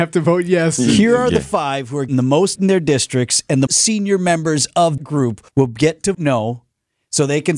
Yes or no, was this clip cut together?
yes